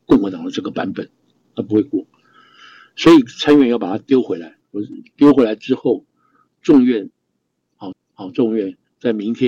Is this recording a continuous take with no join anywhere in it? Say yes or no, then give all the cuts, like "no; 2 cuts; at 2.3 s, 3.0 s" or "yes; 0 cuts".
no; 1 cut; at 7.9 s